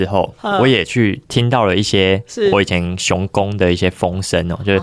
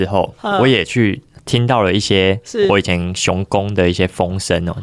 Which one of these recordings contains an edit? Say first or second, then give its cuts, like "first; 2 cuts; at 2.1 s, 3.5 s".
first; 1 cut; at 1.3 s